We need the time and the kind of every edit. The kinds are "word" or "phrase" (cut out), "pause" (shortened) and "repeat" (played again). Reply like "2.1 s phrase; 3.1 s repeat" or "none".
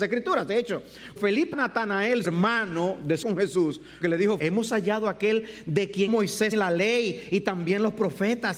1.2 s word; 1.5 s word; 2.2 s word; 3.2 s word; 4.0 s word; 4.4 s word; 6.1 s word; 6.5 s word

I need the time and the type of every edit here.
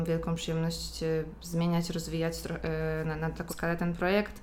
3.5 s word

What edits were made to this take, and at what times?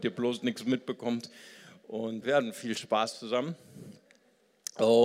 2.2 s word

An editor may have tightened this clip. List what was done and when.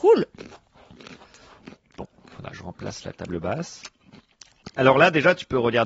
2.5 s word

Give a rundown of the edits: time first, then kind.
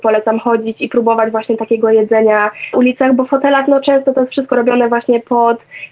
2.7 s word

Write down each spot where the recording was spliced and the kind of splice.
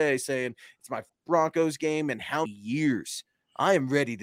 1.1 s word; 2.5 s word

